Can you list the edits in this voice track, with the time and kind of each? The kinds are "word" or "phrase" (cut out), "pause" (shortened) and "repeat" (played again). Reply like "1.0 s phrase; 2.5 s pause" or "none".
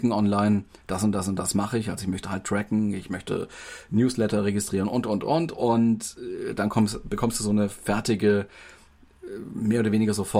none